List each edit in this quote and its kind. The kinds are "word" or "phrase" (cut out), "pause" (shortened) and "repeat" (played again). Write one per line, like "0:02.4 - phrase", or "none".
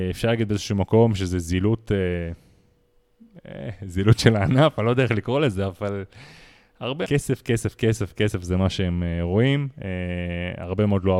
0:07.0 - phrase